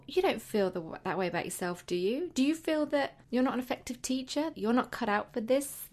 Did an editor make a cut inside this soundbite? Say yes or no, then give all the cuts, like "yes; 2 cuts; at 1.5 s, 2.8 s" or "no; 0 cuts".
yes; 2 cuts; at 3.2 s, 4.5 s